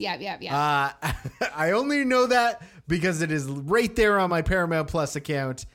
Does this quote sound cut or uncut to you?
uncut